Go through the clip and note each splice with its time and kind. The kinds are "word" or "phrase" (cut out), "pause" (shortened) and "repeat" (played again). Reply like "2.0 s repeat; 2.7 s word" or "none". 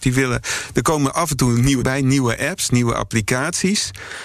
1.8 s word